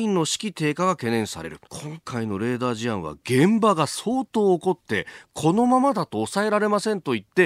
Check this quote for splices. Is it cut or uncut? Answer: cut